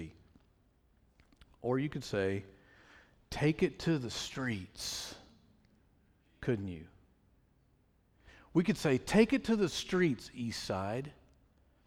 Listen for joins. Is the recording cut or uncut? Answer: uncut